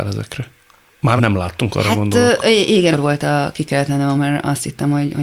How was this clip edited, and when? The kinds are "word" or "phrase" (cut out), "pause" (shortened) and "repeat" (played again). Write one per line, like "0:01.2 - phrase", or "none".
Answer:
0:01.2 - word
0:02.9 - word
0:04.2 - word